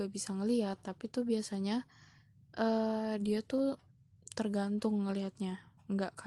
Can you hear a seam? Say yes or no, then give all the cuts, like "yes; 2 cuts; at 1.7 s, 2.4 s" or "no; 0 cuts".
no; 0 cuts